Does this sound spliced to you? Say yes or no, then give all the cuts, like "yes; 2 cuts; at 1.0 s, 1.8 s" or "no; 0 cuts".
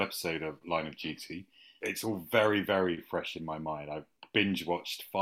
no; 0 cuts